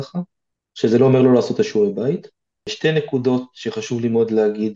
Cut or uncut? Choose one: uncut